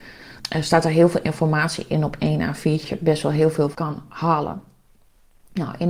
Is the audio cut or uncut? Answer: cut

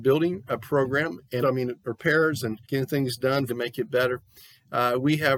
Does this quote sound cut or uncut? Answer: cut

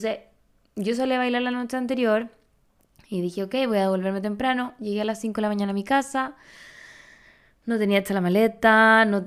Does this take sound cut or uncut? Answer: uncut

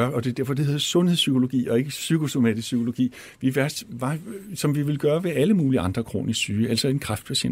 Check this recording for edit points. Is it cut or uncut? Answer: uncut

